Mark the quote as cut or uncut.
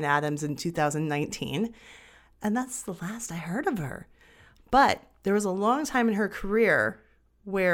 uncut